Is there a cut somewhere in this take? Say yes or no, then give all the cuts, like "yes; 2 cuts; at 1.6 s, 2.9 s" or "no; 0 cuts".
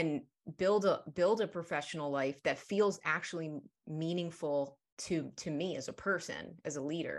no; 0 cuts